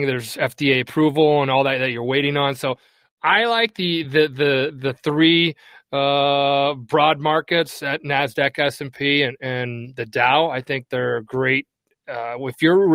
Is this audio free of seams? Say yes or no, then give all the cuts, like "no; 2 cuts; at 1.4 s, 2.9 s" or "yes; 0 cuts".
yes; 0 cuts